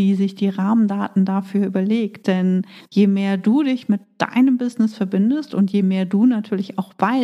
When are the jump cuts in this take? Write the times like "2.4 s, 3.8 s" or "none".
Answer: 2.8 s

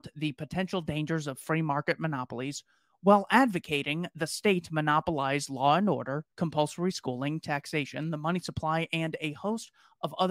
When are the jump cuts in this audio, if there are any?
6.3 s

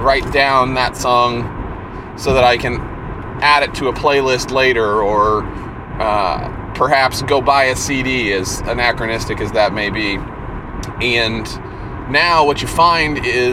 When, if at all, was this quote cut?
none

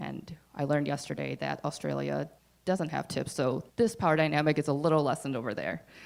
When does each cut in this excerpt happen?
2.4 s, 3.7 s

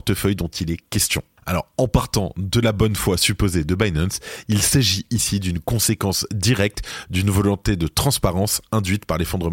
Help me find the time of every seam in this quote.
none

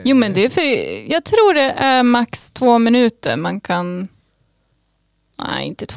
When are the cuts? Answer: none

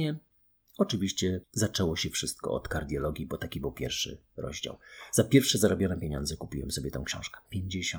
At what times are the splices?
1.4 s

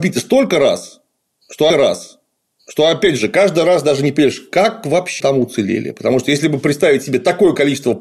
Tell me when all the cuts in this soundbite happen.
1.7 s, 5.2 s

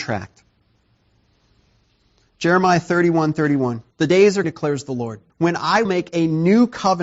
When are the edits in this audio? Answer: 3.9 s, 4.4 s, 5.3 s, 5.9 s

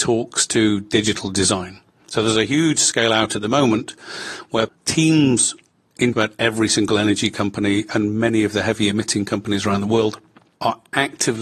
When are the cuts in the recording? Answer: 6.1 s

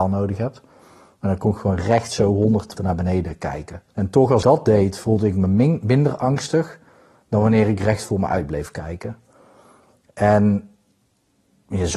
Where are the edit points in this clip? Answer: 2.8 s, 3.9 s, 4.4 s

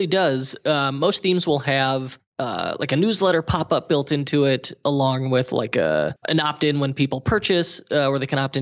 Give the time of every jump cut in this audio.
6.2 s

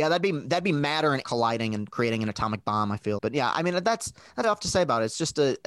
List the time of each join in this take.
1.2 s, 3.2 s, 4.4 s

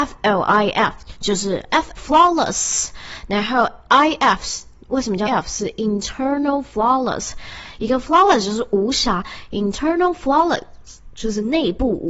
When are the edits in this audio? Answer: 2.0 s, 5.3 s

